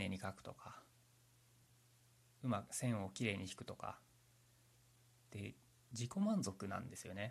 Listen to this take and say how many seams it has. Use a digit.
0